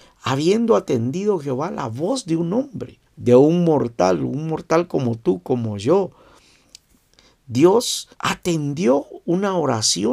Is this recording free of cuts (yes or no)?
no